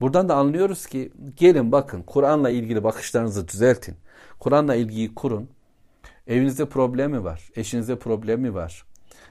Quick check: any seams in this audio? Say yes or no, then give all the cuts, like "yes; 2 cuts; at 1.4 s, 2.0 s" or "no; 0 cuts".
no; 0 cuts